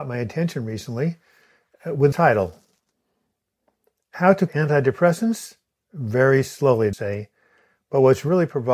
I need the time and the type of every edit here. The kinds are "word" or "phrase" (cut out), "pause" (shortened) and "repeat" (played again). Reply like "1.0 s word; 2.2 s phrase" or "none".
2.1 s word; 4.5 s word; 6.9 s word